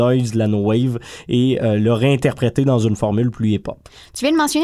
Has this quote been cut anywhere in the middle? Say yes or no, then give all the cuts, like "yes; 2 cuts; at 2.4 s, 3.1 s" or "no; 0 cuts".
no; 0 cuts